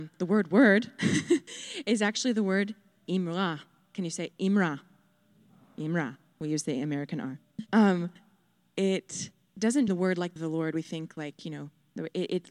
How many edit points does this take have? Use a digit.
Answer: 3